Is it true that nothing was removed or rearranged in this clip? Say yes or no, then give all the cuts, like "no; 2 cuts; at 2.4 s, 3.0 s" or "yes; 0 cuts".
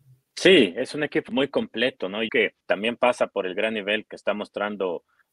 no; 4 cuts; at 1.3 s, 2.3 s, 2.6 s, 4.1 s